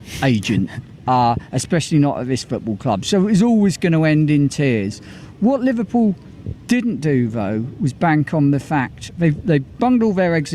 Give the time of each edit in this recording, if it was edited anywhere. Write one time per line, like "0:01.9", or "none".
0:06.6